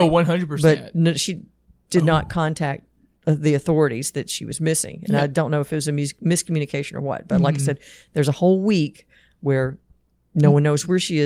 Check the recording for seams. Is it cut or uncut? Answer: uncut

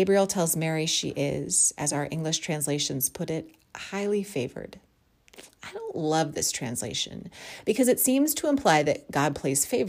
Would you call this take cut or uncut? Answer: uncut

